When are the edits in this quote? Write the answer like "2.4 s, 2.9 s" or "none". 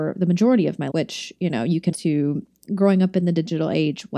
0.9 s, 1.9 s